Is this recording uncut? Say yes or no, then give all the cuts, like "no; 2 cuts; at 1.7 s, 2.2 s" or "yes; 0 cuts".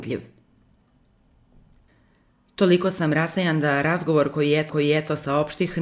no; 1 cut; at 4.7 s